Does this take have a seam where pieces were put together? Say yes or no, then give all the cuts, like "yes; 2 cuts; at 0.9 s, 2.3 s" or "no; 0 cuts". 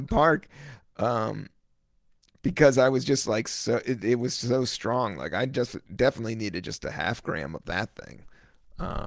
no; 0 cuts